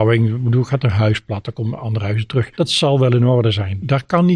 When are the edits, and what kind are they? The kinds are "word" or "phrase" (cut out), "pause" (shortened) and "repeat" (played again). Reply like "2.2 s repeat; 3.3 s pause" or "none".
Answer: 2.5 s pause